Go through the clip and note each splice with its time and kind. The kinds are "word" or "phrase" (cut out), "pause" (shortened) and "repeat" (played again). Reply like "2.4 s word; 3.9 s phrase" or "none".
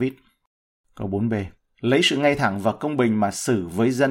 none